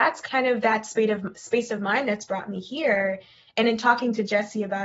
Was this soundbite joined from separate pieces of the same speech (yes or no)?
no